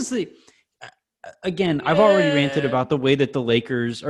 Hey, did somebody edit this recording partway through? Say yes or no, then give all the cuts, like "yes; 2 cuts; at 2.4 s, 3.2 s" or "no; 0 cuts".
no; 0 cuts